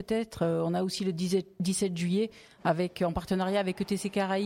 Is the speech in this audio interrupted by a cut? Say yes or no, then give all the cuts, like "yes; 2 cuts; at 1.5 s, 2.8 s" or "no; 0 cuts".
no; 0 cuts